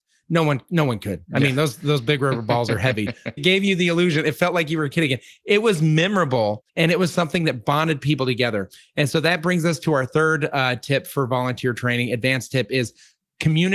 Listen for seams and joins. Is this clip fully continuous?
no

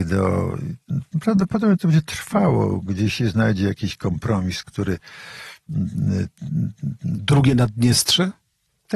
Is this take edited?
no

